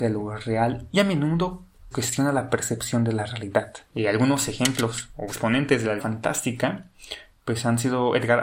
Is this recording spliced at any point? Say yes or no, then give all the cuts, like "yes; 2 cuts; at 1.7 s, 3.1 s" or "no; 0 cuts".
yes; 5 cuts; at 0.9 s, 1.9 s, 3.8 s, 5.3 s, 6.0 s